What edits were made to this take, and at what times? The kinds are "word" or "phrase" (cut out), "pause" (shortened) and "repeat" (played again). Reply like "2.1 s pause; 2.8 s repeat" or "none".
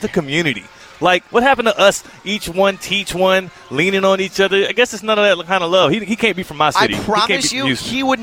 1.3 s pause